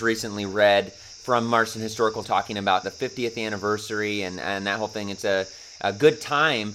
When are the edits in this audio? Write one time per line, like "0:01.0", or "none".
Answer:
0:02.2
0:02.8